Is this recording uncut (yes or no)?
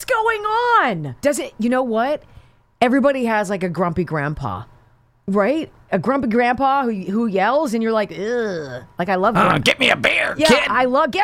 no